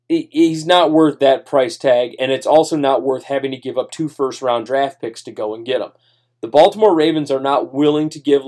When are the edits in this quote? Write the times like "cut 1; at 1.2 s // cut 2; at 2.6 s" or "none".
none